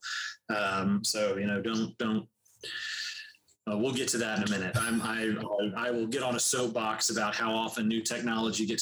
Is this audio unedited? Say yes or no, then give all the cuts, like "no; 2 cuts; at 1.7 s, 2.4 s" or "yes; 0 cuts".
yes; 0 cuts